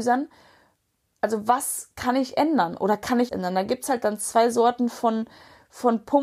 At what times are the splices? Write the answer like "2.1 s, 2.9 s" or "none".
3.3 s